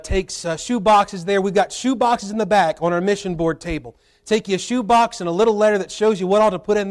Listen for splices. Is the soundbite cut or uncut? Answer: uncut